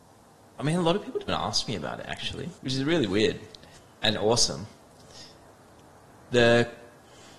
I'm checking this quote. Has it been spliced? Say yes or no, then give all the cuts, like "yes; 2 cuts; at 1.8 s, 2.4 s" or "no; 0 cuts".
yes; 2 cuts; at 1.3 s, 2.6 s